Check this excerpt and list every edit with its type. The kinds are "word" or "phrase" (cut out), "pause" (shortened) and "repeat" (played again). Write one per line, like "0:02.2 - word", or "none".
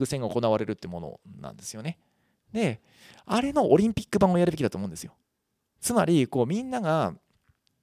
none